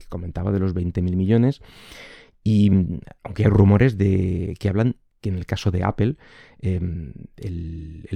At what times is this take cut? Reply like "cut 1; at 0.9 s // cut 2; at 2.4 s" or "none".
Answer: none